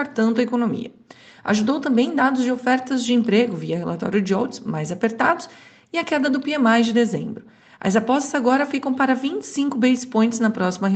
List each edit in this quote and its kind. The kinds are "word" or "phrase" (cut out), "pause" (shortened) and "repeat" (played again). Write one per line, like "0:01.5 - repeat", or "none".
none